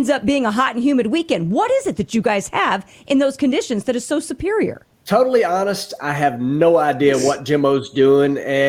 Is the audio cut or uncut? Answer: cut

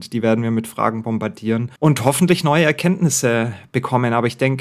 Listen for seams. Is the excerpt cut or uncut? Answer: cut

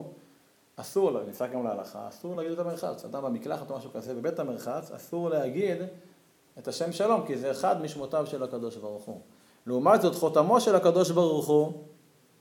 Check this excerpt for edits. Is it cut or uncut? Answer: uncut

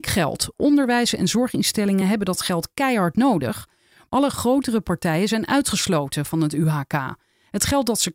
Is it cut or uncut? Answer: uncut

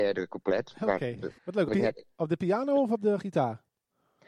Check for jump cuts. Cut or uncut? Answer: cut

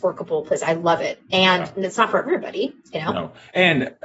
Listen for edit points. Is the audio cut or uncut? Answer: uncut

